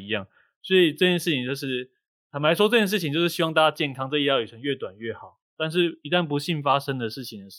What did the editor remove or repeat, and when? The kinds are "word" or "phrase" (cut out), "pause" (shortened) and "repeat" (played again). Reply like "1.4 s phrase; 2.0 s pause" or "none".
none